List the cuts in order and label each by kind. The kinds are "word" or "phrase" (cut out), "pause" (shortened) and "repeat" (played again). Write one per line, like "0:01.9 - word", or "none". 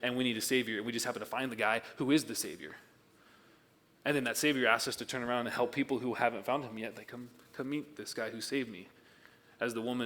0:07.0 - word